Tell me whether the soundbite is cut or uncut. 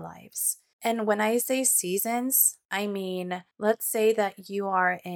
cut